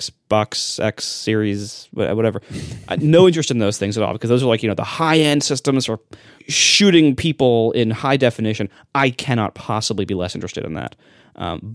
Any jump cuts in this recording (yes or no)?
no